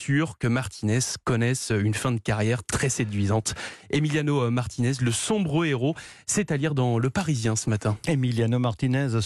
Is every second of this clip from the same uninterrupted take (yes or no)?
yes